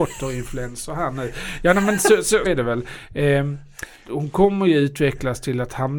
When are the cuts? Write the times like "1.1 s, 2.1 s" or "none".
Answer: 2.4 s, 4.0 s